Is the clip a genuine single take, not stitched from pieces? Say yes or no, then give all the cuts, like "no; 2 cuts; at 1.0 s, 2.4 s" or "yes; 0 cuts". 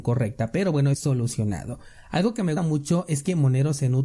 no; 2 cuts; at 0.9 s, 2.6 s